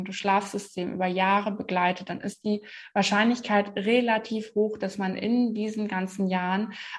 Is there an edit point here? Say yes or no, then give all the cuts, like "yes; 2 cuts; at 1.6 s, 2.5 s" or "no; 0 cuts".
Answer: no; 0 cuts